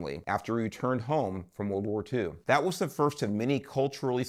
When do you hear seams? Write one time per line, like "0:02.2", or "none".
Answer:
none